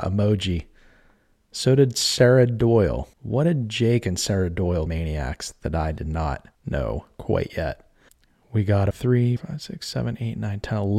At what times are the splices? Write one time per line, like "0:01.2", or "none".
0:03.1
0:04.9
0:06.5
0:08.1
0:08.9
0:09.4